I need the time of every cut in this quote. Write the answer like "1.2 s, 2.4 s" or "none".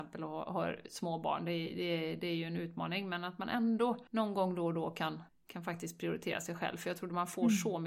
4.1 s, 5.3 s